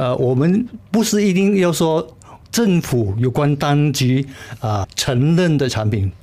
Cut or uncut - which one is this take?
cut